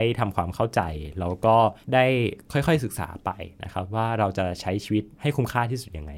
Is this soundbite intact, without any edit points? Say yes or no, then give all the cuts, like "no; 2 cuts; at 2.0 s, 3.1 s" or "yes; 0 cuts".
no; 2 cuts; at 1.8 s, 5.1 s